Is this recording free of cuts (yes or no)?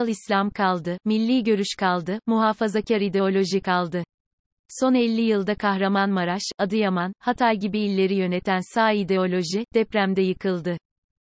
yes